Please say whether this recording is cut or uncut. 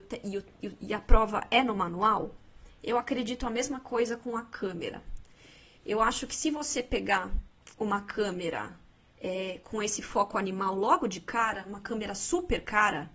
uncut